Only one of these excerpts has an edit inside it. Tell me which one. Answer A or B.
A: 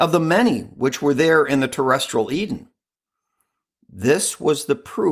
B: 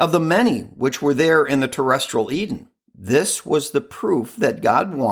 B